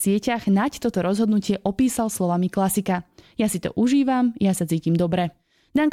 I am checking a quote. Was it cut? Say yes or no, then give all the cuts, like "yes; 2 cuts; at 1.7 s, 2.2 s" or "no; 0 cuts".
no; 0 cuts